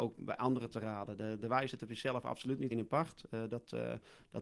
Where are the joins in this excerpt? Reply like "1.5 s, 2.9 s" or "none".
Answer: 2.7 s